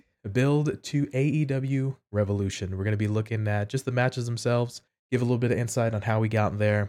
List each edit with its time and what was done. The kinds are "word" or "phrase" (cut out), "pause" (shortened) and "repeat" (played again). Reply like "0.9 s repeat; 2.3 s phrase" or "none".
4.9 s pause